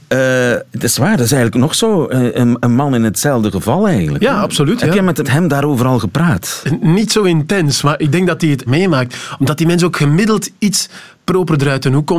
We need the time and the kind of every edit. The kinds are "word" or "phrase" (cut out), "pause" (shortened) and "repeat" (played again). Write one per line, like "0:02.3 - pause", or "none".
0:05.2 - word
0:08.7 - phrase